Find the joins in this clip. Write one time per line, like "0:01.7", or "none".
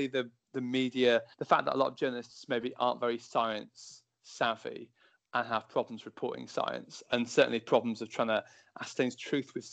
0:01.3